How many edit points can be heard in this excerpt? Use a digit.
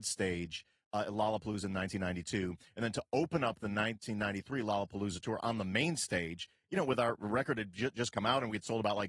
0